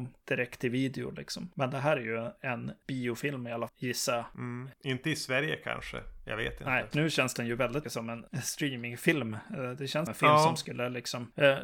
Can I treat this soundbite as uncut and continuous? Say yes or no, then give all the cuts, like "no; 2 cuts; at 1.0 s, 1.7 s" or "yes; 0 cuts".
no; 4 cuts; at 3.7 s, 6.9 s, 7.8 s, 10.1 s